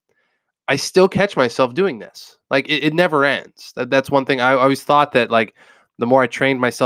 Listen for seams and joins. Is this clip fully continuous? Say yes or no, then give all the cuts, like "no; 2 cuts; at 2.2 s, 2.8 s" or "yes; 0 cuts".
yes; 0 cuts